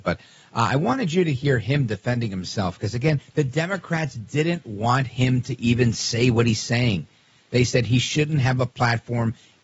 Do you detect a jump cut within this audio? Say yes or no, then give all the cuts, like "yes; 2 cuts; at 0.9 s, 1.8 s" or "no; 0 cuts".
no; 0 cuts